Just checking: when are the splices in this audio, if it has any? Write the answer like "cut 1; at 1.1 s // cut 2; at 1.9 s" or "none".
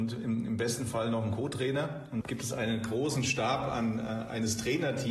cut 1; at 2.2 s